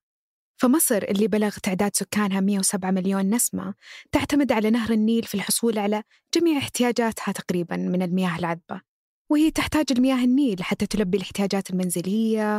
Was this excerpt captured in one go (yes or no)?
yes